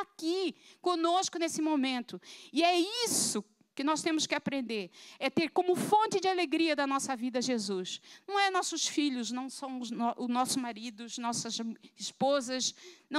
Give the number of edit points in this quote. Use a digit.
0